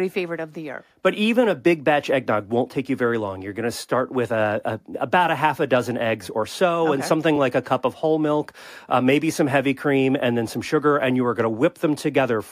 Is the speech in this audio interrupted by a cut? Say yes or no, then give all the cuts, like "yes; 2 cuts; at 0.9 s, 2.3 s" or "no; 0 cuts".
no; 0 cuts